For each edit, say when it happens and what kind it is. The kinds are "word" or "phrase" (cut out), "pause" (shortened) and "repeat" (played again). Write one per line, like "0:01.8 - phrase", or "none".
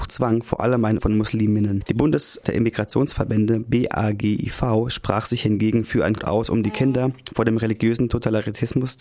0:01.0 - word
0:02.4 - word
0:06.2 - word